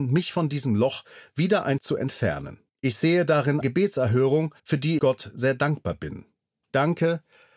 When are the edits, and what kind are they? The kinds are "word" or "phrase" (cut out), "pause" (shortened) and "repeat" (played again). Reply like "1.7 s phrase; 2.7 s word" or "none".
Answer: 1.8 s word; 2.7 s pause; 3.6 s word; 4.6 s pause; 5.0 s word